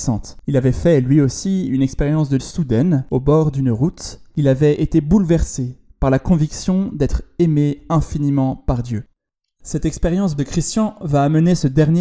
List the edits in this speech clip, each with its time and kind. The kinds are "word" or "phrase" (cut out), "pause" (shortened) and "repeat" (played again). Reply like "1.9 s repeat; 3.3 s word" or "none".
2.4 s word; 9.3 s pause; 10.4 s word